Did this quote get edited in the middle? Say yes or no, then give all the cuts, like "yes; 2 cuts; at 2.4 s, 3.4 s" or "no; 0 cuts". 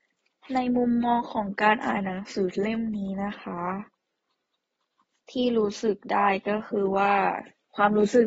no; 0 cuts